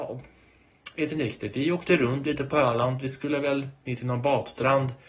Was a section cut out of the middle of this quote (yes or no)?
no